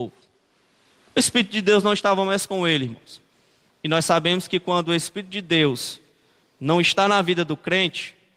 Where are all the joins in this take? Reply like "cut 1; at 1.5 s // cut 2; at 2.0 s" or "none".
none